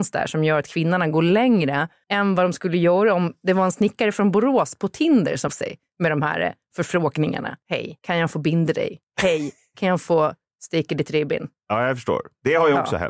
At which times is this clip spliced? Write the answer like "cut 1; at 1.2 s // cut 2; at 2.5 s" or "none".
cut 1; at 5.5 s